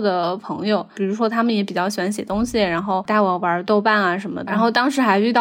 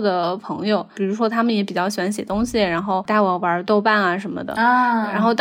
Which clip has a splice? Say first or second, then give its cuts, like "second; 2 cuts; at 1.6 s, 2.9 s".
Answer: first; 1 cut; at 4.5 s